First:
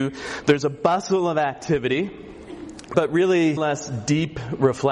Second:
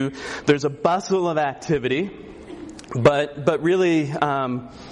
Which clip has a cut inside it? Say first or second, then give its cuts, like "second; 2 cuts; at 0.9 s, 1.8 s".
first; 2 cuts; at 2.9 s, 3.6 s